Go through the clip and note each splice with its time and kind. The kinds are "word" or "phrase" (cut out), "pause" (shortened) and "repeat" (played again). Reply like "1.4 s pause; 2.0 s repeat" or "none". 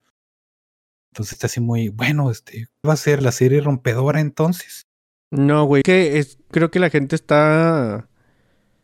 1.3 s word; 2.8 s word; 3.2 s word; 5.8 s word; 6.5 s word